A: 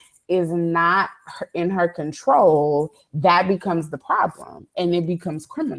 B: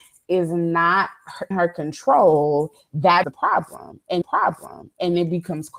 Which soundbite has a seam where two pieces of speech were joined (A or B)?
B